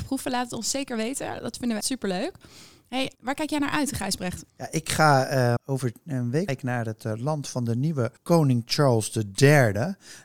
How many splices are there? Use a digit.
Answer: 6